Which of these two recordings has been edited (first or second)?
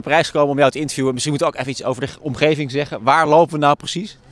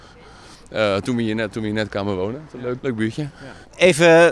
second